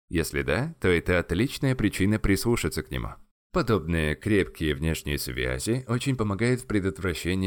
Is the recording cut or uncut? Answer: uncut